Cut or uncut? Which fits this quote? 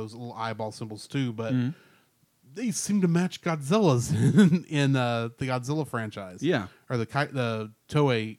cut